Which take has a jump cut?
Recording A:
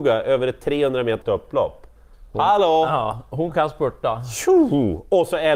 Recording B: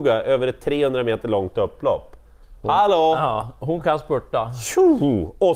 A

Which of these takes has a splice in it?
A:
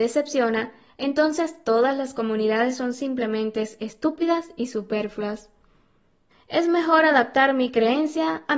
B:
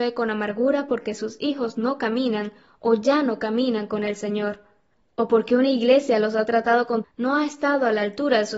B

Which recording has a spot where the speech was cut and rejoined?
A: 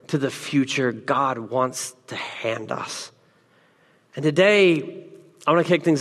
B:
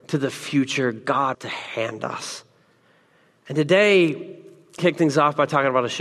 B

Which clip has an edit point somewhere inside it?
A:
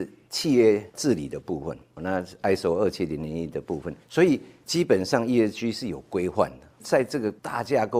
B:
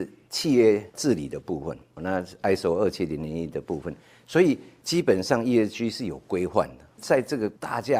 A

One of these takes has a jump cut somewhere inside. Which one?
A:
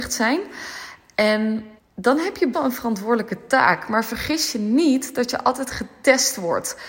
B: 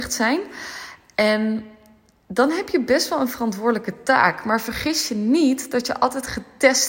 A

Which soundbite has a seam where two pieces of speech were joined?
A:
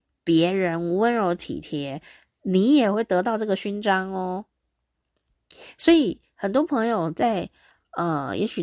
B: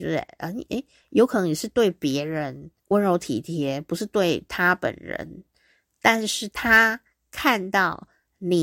B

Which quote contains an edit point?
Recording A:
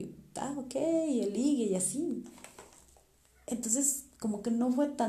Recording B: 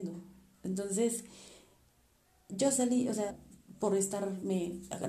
B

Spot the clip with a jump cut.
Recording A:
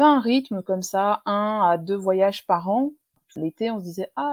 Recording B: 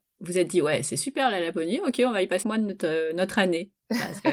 B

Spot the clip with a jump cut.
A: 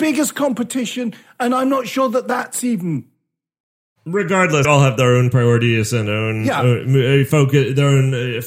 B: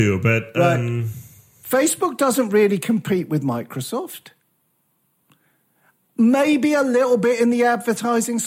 A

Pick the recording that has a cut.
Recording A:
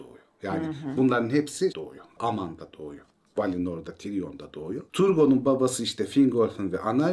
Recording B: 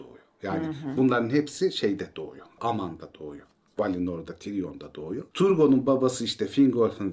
A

